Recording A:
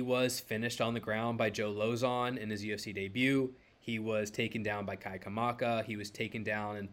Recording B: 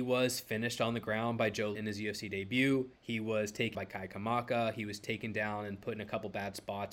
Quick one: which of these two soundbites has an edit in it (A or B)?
B